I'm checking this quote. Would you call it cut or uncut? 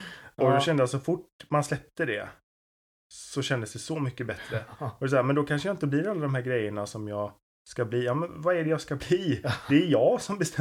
uncut